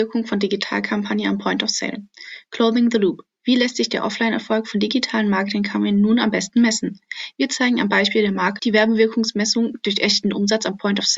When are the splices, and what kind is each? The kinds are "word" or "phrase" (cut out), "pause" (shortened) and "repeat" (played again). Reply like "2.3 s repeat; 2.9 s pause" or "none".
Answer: 8.6 s word